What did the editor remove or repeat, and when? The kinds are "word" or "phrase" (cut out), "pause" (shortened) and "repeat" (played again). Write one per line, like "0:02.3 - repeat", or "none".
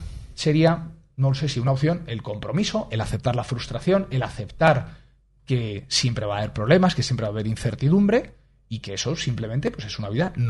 none